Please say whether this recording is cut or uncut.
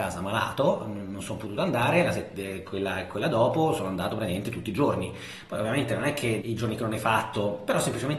cut